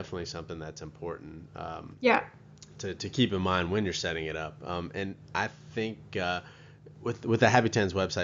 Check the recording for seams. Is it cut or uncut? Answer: uncut